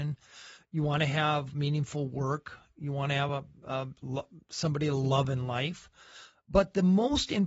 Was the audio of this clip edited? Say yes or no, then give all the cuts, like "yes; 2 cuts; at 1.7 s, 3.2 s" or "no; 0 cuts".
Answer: no; 0 cuts